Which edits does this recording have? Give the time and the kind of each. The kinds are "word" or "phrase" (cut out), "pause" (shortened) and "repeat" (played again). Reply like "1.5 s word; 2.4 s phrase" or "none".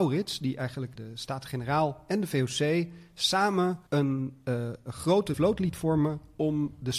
1.0 s word; 3.9 s pause; 5.3 s word